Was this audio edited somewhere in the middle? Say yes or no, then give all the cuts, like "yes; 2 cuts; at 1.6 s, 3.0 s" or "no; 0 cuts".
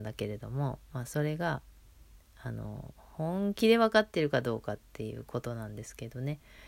no; 0 cuts